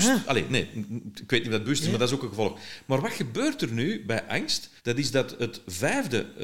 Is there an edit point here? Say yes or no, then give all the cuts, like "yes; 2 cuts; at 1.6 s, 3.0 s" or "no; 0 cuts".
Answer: yes; 1 cut; at 4.8 s